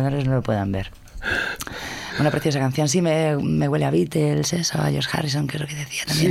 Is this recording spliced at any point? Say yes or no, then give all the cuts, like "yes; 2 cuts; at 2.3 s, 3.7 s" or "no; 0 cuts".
no; 0 cuts